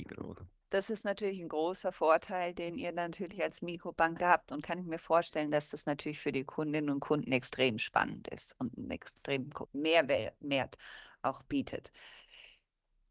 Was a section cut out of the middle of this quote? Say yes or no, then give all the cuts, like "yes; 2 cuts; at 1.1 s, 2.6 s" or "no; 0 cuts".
yes; 1 cut; at 9.7 s